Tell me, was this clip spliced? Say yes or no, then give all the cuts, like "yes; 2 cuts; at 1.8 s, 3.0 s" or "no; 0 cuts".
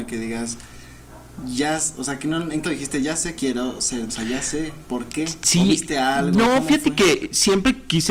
yes; 3 cuts; at 2.6 s, 3.4 s, 4.1 s